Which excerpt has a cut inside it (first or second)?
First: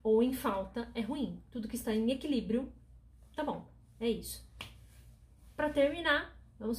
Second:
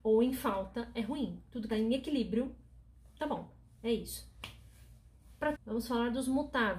second